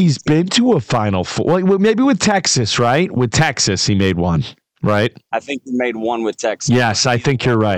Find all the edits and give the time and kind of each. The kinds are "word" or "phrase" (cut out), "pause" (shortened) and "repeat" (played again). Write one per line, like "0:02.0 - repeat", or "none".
none